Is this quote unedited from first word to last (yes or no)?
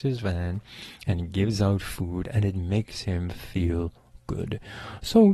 yes